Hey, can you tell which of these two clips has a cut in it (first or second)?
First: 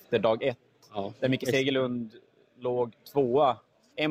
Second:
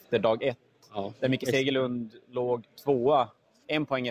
second